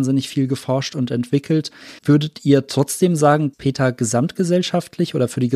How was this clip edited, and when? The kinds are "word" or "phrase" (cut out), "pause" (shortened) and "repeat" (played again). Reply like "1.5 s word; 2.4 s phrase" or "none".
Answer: 2.0 s pause; 3.5 s word